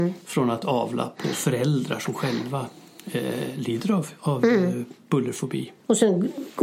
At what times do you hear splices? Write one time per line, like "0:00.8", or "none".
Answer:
none